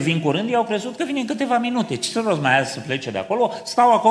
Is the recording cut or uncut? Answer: uncut